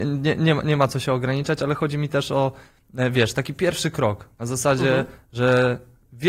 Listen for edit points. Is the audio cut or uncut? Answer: uncut